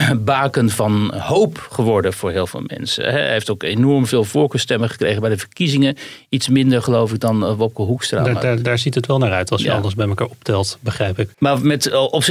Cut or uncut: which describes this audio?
cut